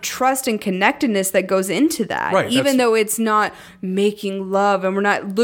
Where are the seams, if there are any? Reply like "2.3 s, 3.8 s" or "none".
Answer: none